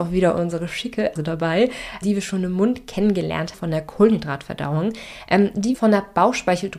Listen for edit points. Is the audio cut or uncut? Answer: cut